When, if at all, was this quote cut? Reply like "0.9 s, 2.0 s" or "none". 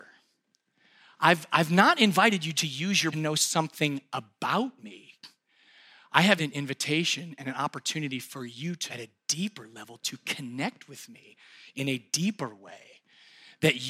2.5 s, 3.1 s, 6.4 s, 8.9 s